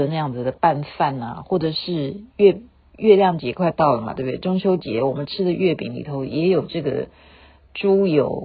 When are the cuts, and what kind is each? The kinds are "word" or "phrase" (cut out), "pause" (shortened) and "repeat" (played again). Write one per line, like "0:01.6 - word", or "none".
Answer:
none